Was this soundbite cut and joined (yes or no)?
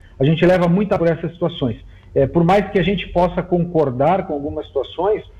yes